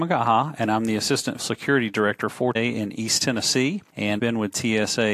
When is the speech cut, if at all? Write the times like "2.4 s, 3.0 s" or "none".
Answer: 1.4 s, 2.5 s, 4.2 s